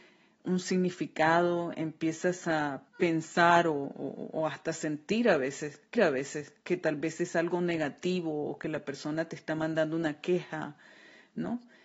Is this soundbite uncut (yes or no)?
no